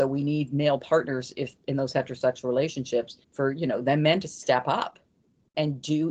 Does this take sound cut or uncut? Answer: cut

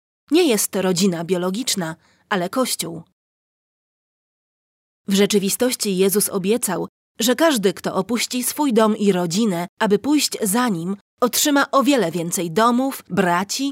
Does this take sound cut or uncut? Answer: uncut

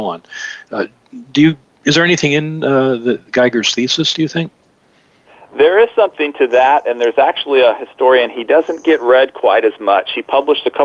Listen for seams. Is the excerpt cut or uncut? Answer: uncut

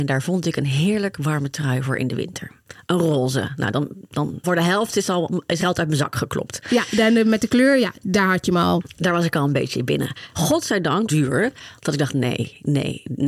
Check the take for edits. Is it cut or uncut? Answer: cut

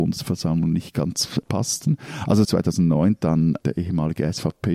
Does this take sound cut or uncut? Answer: cut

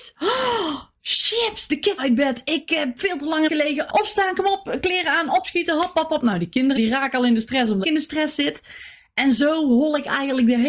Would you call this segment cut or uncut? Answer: cut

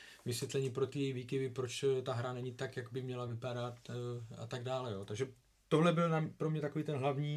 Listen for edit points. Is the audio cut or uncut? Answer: uncut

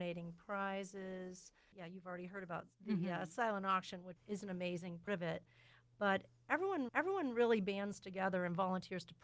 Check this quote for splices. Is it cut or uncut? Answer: cut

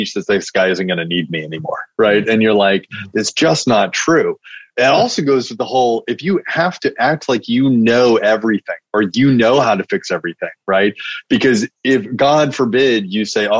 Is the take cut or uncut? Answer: uncut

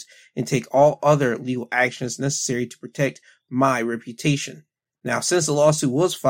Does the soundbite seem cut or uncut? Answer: uncut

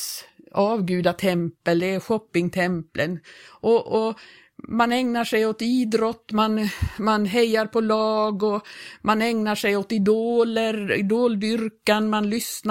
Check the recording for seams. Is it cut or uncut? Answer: uncut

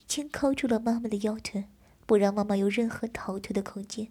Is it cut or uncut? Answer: uncut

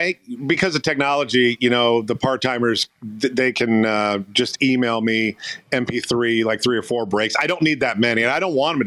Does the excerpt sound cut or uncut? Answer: uncut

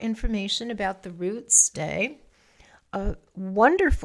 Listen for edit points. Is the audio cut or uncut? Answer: cut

